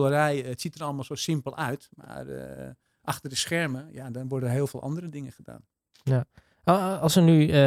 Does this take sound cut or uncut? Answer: uncut